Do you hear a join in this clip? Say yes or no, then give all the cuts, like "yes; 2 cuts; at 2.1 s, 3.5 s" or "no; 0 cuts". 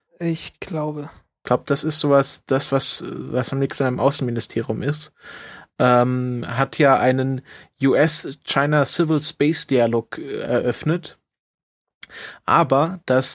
no; 0 cuts